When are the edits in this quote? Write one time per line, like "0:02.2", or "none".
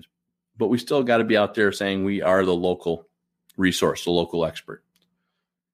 none